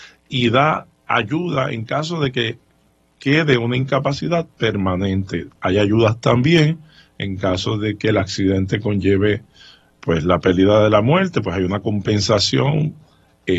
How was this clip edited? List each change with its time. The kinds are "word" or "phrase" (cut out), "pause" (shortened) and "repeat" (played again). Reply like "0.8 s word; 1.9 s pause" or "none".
none